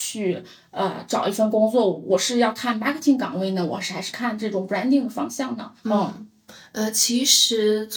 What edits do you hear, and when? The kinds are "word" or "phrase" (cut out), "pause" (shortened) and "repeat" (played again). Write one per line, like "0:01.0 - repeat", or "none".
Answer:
0:05.8 - pause

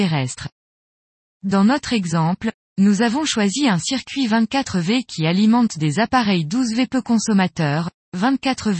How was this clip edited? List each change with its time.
none

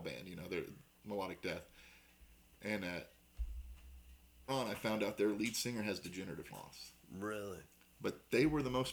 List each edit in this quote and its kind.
0:04.5 - word
0:06.5 - word

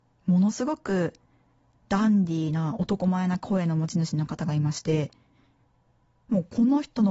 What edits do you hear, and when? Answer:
none

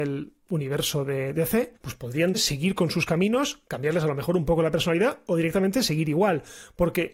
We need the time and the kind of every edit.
0:01.8 - pause
0:02.3 - word

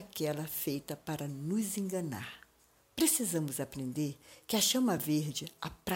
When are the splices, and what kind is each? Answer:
none

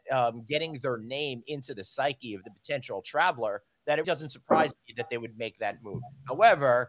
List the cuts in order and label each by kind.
0:04.0 - word

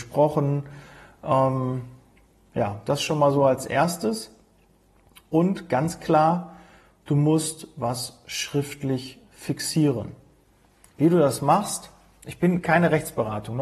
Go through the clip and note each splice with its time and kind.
none

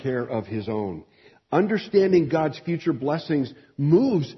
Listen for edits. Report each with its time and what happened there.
none

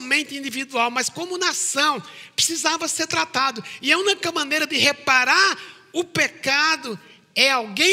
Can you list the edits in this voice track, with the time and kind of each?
none

